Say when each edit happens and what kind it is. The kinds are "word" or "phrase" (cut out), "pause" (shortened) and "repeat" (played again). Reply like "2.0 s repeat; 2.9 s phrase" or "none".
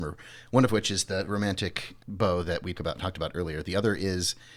2.0 s word; 2.7 s word